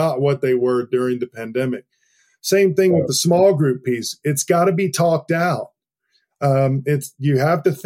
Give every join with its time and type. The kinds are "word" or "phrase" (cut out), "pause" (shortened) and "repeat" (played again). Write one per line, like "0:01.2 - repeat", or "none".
none

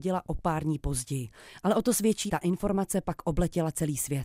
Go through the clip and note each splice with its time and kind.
0:02.3 - word

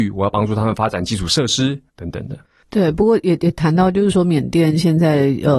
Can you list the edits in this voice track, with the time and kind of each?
0:01.9 - pause

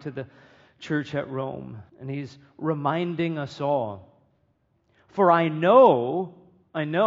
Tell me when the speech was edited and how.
0:01.9 - pause

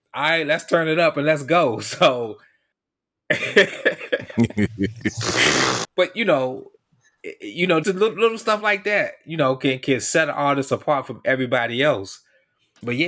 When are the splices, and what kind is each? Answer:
0:05.8 - word
0:07.8 - word

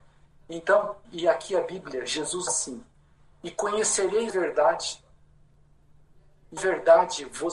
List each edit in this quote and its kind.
0:01.0 - word
0:02.5 - phrase
0:04.3 - word
0:06.6 - word

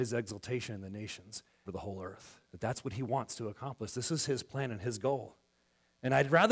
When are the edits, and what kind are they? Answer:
0:01.7 - phrase
0:02.4 - pause

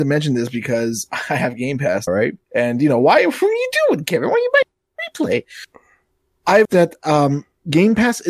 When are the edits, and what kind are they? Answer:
0:02.1 - word
0:02.4 - pause
0:06.6 - word

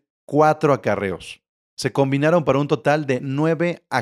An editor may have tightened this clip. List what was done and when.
0:01.6 - pause

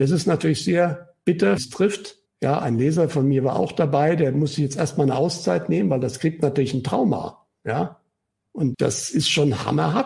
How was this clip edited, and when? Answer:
0:01.6 - phrase
0:02.3 - pause
0:08.7 - word

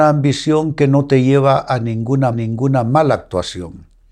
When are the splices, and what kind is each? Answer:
0:02.3 - repeat

